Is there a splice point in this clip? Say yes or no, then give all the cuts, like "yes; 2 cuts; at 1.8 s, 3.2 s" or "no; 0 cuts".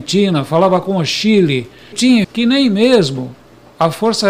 yes; 2 cuts; at 1.9 s, 2.2 s